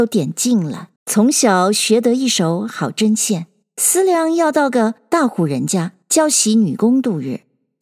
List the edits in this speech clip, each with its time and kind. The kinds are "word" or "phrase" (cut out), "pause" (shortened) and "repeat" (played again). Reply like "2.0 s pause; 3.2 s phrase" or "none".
1.0 s pause; 3.6 s pause; 6.0 s pause